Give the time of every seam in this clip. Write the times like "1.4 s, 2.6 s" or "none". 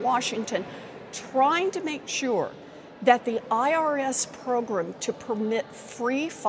none